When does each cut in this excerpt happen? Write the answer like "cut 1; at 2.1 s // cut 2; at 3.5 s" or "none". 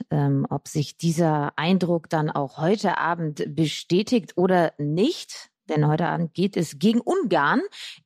cut 1; at 5.6 s